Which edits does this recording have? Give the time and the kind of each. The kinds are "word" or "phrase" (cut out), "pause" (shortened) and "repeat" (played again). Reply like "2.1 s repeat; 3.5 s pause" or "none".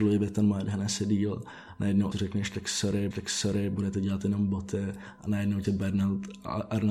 2.1 s word; 3.1 s repeat; 5.6 s word